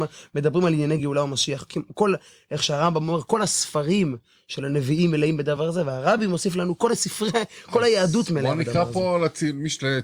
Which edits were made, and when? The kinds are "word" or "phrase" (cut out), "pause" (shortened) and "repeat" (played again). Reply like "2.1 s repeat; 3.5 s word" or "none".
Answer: none